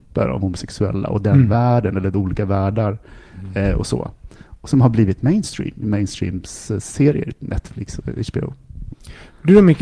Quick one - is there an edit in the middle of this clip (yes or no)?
no